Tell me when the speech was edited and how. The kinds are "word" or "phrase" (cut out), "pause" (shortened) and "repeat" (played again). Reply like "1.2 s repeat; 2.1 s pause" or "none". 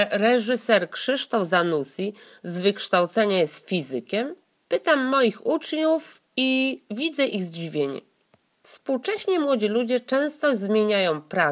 none

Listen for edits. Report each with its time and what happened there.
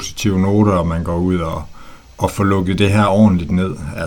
none

